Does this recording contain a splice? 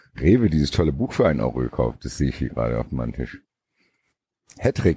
no; 0 cuts

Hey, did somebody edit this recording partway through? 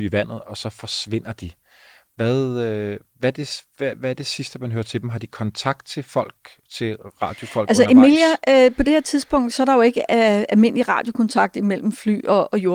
no; 0 cuts

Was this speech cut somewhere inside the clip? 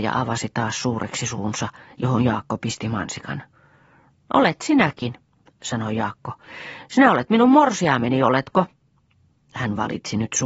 no; 0 cuts

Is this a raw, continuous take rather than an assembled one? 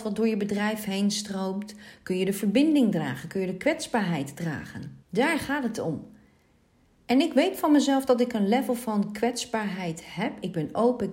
no; 1 cut; at 5.0 s

